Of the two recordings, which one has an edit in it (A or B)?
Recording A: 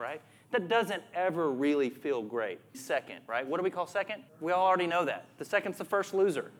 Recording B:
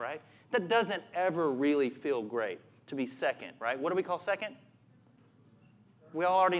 A